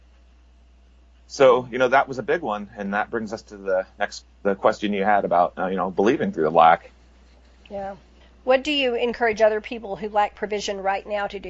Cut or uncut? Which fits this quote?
cut